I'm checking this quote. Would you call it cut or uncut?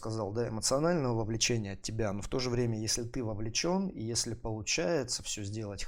uncut